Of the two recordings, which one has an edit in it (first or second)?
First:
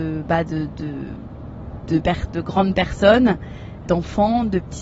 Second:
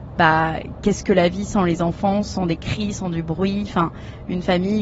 first